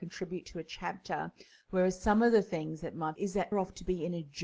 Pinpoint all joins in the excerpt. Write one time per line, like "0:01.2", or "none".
0:03.2
0:03.5